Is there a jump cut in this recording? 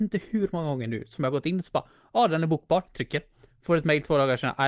no; 0 cuts

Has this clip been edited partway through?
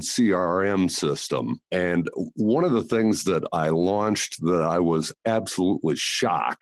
yes; 1 cut; at 1.6 s

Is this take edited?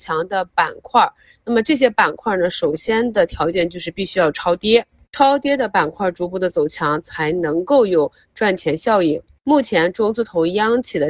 no; 0 cuts

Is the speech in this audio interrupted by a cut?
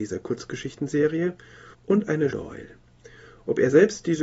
yes; 2 cuts; at 1.7 s, 2.3 s

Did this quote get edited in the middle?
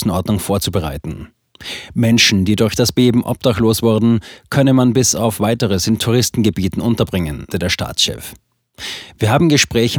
yes; 1 cut; at 7.5 s

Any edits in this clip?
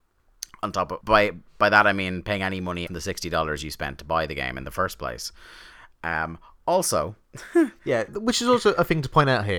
yes; 3 cuts; at 1.0 s, 2.9 s, 8.1 s

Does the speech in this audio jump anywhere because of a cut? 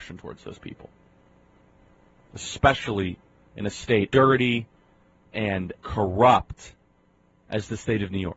yes; 2 cuts; at 4.1 s, 5.7 s

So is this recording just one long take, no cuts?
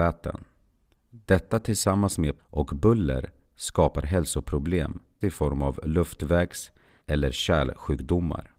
no; 3 cuts; at 2.4 s, 5.2 s, 7.0 s

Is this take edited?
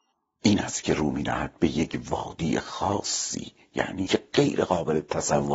yes; 1 cut; at 4.1 s

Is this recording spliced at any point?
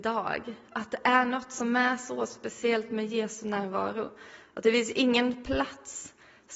no; 0 cuts

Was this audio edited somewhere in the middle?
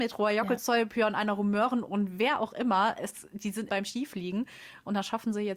yes; 1 cut; at 3.7 s

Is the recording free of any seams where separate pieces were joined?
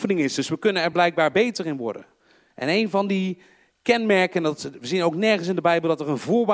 yes; 0 cuts

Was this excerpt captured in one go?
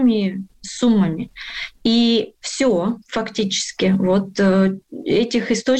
yes; 0 cuts

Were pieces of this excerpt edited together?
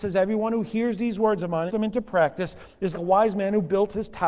yes; 2 cuts; at 1.7 s, 2.9 s

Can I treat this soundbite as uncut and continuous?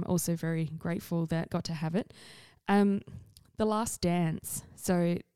no; 1 cut; at 1.5 s

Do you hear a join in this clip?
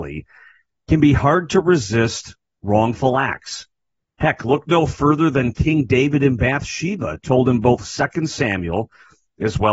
no; 0 cuts

